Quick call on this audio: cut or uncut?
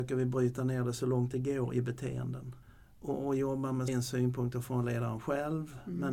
cut